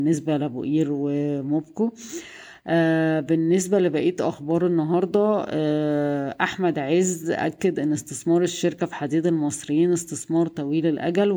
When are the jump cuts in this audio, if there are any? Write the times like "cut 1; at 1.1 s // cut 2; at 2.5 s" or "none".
none

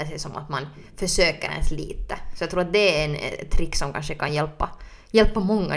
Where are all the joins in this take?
none

